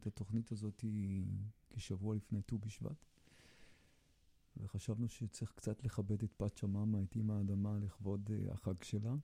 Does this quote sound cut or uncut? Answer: uncut